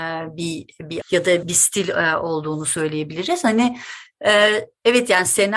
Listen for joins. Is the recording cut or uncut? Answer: cut